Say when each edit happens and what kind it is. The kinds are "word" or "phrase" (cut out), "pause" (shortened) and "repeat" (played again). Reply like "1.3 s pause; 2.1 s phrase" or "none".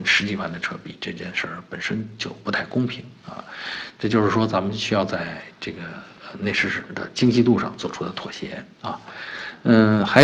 8.7 s pause